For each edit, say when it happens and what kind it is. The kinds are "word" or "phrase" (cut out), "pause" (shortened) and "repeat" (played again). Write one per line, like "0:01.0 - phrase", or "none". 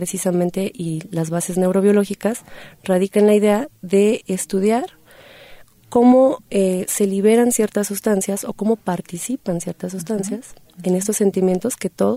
none